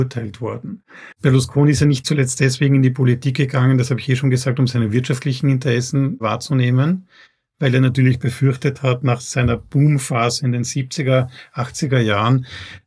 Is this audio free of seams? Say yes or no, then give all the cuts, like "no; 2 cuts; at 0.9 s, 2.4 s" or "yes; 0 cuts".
no; 1 cut; at 1.1 s